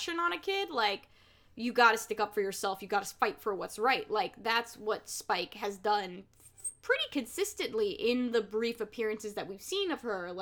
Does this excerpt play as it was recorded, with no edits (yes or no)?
yes